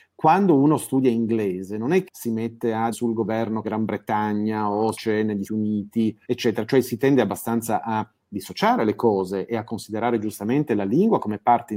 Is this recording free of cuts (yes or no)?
no